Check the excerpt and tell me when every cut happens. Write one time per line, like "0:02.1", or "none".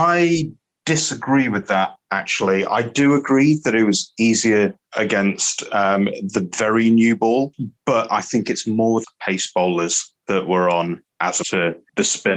0:02.0
0:09.0
0:10.2
0:11.4